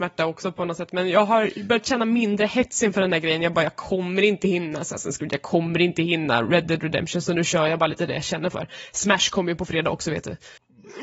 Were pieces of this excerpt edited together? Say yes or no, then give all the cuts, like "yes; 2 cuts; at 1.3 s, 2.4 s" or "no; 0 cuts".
no; 0 cuts